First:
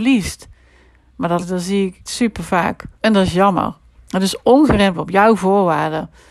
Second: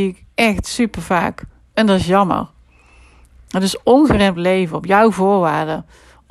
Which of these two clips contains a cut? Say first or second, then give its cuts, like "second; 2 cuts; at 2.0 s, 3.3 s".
first; 5 cuts; at 1.4 s, 2.1 s, 2.9 s, 3.9 s, 4.9 s